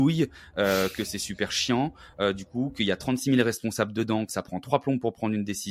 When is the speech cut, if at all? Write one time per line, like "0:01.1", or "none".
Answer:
none